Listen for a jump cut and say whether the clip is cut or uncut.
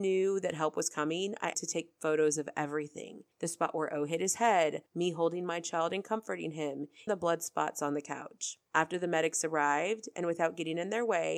cut